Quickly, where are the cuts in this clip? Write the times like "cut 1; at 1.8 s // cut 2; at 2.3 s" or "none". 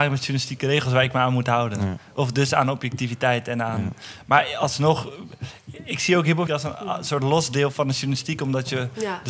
cut 1; at 6.5 s